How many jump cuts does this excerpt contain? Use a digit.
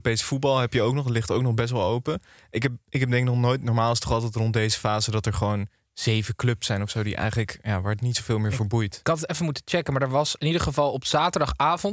0